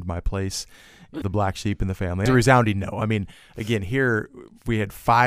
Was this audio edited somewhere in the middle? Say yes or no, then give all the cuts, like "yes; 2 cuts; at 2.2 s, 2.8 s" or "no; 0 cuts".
yes; 2 cuts; at 1.2 s, 2.3 s